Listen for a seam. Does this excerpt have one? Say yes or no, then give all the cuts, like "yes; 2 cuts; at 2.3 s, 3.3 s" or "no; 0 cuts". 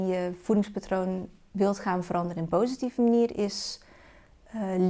no; 0 cuts